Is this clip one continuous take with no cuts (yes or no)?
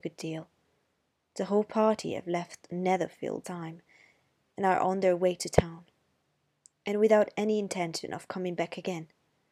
no